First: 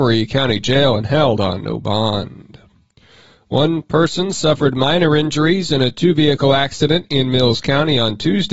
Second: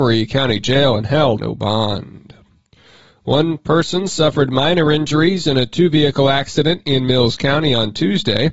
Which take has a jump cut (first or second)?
second